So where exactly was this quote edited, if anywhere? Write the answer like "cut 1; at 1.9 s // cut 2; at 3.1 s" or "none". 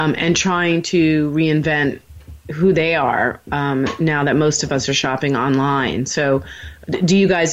none